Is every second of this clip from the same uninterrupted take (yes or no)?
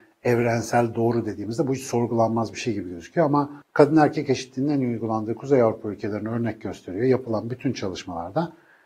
no